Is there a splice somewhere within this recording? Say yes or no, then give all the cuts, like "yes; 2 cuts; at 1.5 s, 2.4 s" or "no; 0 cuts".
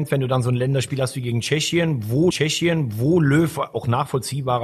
yes; 1 cut; at 2.3 s